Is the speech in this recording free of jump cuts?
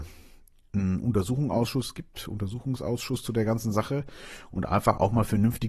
yes; 0 cuts

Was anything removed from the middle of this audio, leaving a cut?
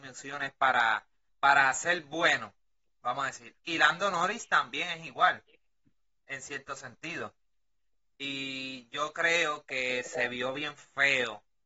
yes; 1 cut; at 1.3 s

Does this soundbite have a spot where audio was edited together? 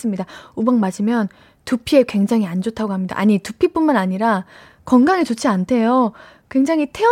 no; 0 cuts

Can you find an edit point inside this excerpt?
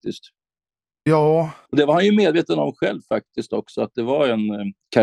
no; 0 cuts

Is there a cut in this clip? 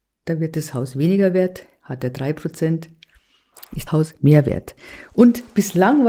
yes; 1 cut; at 3.9 s

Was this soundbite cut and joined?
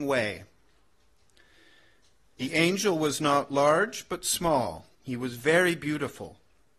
yes; 1 cut; at 4.9 s

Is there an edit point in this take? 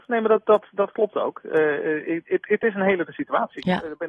yes; 1 cut; at 3.1 s

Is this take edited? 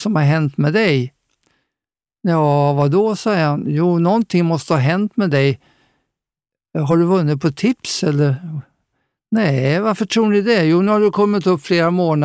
no; 0 cuts

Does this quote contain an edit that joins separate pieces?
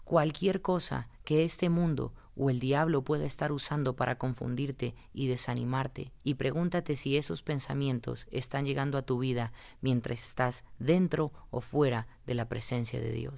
yes; 1 cut; at 6.2 s

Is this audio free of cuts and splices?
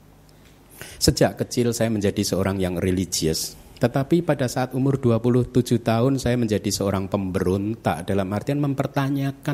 yes; 0 cuts

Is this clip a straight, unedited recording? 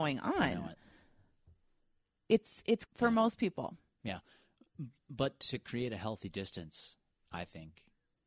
no; 1 cut; at 2.9 s

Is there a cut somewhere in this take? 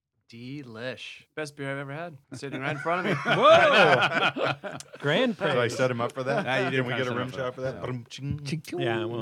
yes; 2 cuts; at 1.3 s, 2.2 s

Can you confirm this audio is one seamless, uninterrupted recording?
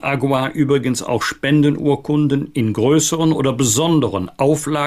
yes; 0 cuts

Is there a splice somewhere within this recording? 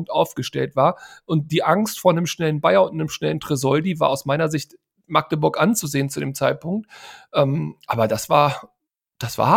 no; 0 cuts

